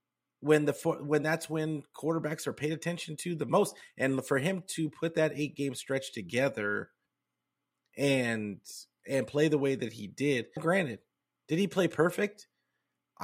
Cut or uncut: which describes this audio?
cut